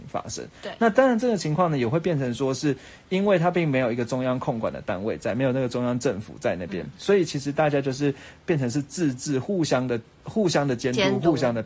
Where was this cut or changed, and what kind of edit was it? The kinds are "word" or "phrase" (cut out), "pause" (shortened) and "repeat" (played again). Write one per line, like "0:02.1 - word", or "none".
0:10.1 - pause